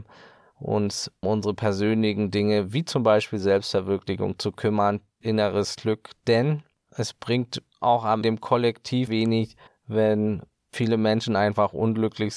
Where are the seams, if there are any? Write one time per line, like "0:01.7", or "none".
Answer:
0:01.2
0:05.2
0:06.7
0:08.2
0:09.1
0:09.7